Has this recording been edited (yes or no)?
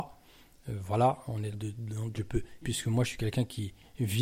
yes